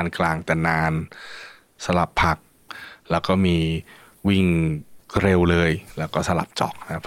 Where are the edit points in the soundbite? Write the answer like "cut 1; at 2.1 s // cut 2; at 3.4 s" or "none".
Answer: none